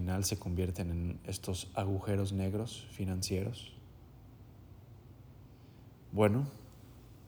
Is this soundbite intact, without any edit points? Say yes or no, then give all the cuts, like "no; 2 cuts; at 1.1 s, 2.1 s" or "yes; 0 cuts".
yes; 0 cuts